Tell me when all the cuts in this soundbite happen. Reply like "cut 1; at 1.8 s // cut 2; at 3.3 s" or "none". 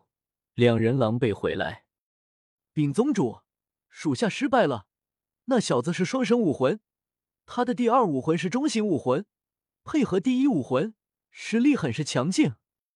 none